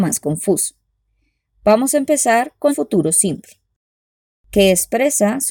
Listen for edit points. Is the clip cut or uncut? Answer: cut